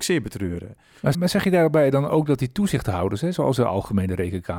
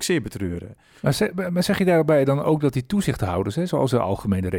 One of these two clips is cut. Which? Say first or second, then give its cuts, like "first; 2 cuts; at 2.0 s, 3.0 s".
first; 1 cut; at 1.1 s